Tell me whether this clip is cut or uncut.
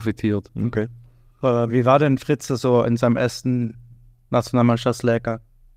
uncut